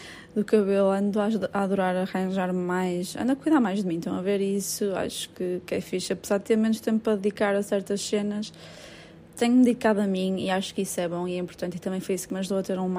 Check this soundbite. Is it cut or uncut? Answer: uncut